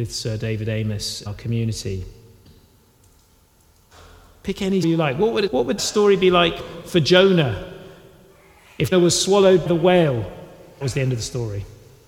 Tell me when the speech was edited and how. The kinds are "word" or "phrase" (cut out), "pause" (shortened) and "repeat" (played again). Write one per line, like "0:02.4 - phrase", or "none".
0:01.3 - word
0:04.8 - word
0:05.5 - word
0:05.8 - word
0:06.6 - word
0:08.9 - word
0:09.7 - word
0:10.8 - word